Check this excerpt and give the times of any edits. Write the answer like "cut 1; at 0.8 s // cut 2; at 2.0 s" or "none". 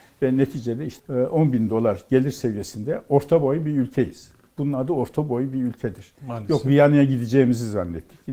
cut 1; at 1.0 s